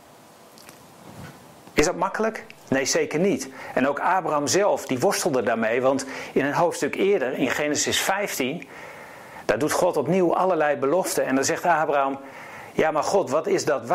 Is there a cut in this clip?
yes; 1 cut; at 2.6 s

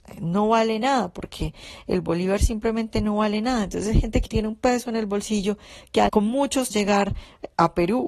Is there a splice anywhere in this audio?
yes; 3 cuts; at 4.3 s, 6.1 s, 6.7 s

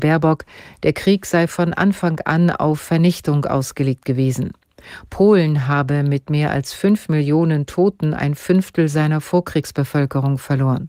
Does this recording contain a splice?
no; 0 cuts

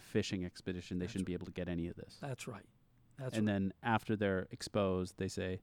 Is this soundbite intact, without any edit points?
yes; 0 cuts

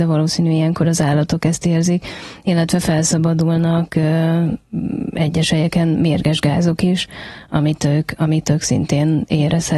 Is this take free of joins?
yes; 0 cuts

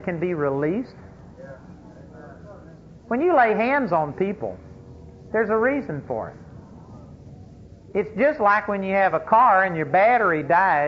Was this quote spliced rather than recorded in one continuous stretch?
no; 0 cuts

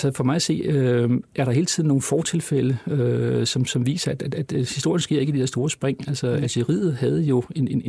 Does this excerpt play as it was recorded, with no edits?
no; 1 cut; at 3.7 s

